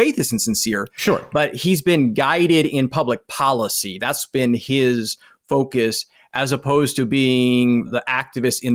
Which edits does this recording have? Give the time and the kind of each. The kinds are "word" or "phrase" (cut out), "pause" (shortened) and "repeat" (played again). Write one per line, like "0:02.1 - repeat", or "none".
none